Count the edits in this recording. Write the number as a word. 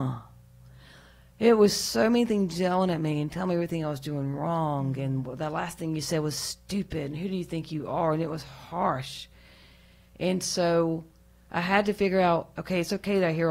zero